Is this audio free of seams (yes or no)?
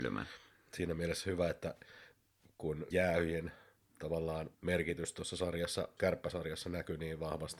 no